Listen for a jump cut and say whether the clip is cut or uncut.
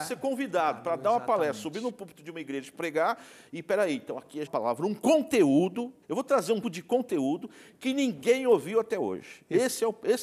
cut